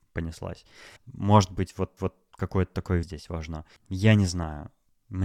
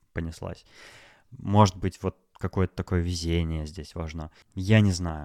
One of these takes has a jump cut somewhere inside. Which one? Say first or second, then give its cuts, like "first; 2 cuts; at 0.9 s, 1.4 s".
first; 3 cuts; at 1.0 s, 2.0 s, 3.0 s